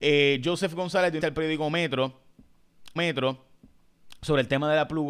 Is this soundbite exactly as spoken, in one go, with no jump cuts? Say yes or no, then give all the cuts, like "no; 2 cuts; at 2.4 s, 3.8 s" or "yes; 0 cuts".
no; 2 cuts; at 1.2 s, 3.0 s